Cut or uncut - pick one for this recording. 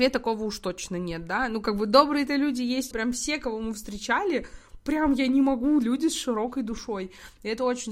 cut